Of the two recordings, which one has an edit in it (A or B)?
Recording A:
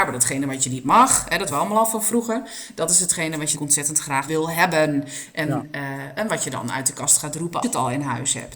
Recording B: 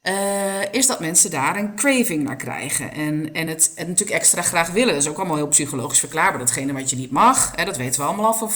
A